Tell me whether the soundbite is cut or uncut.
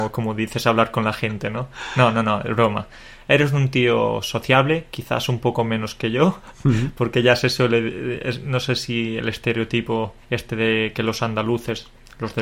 cut